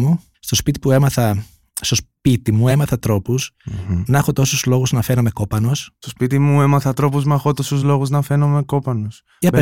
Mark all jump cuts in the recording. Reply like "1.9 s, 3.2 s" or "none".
none